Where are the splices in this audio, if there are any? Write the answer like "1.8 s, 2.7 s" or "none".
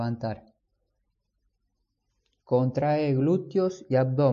none

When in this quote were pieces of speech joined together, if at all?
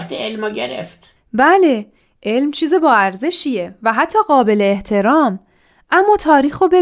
none

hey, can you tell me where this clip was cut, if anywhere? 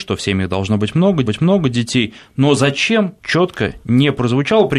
1.2 s, 3.2 s

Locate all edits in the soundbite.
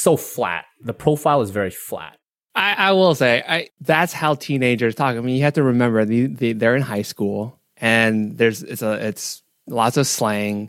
3.4 s

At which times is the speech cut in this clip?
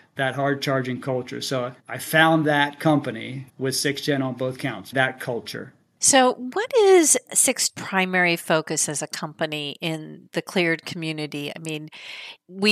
1.8 s, 3.5 s, 4.9 s, 7.7 s

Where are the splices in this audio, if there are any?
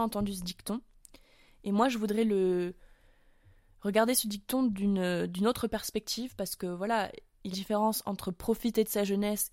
7.5 s

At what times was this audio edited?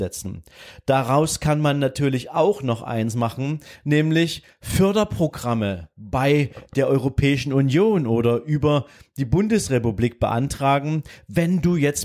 none

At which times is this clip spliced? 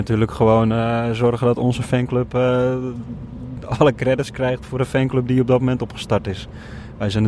none

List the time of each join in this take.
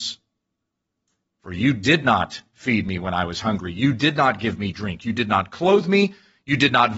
none

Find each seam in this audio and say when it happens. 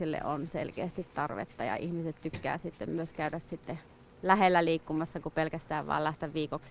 none

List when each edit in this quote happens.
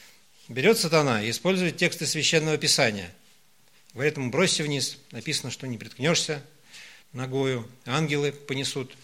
7.0 s

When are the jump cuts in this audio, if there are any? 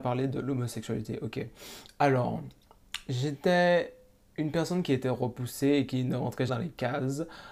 6.5 s

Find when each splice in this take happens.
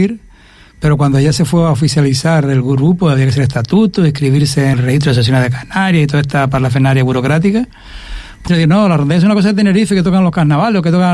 4.7 s, 8.5 s

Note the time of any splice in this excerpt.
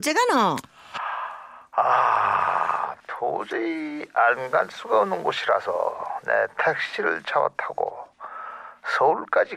none

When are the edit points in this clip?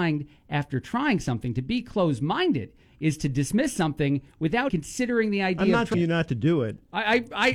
4.7 s, 5.9 s

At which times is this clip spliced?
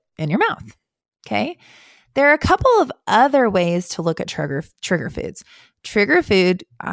none

